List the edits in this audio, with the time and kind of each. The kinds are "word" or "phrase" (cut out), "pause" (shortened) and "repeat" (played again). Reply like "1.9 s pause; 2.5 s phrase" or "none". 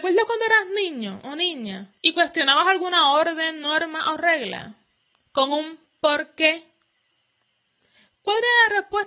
2.0 s pause